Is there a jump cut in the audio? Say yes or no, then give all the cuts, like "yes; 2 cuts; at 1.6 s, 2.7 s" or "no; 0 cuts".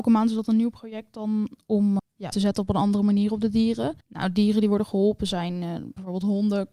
yes; 3 cuts; at 2.0 s, 2.3 s, 4.0 s